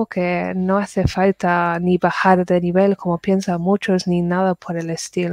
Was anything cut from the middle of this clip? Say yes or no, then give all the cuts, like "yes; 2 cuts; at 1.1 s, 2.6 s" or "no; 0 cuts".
no; 0 cuts